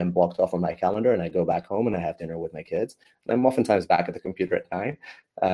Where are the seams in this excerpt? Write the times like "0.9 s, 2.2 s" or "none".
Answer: none